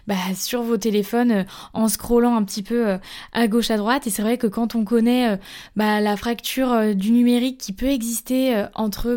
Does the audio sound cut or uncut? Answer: uncut